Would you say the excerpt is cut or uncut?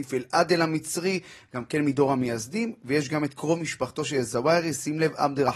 uncut